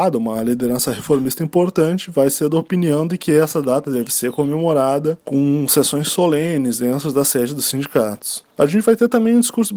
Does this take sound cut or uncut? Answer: uncut